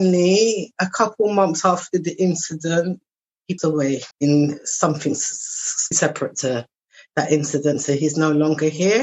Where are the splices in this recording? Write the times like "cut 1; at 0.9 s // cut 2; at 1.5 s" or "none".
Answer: cut 1; at 3.6 s // cut 2; at 4.1 s // cut 3; at 5.9 s